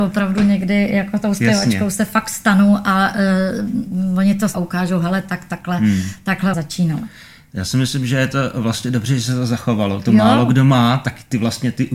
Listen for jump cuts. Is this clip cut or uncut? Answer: cut